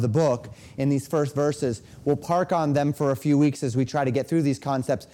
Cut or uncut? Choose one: uncut